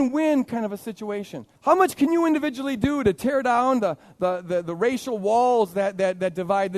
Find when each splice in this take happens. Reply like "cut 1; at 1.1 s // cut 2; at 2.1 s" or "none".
cut 1; at 1.6 s